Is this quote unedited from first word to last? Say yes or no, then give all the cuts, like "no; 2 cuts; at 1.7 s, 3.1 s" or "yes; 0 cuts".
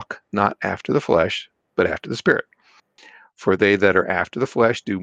yes; 0 cuts